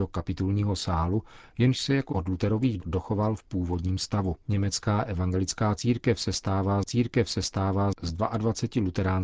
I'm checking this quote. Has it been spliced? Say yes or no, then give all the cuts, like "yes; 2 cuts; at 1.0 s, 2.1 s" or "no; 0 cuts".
yes; 4 cuts; at 2.1 s, 2.8 s, 4.4 s, 6.9 s